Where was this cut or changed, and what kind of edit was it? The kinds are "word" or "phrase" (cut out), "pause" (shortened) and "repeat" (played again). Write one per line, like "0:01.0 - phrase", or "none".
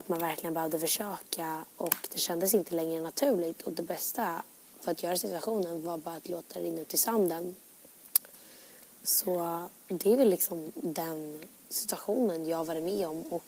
none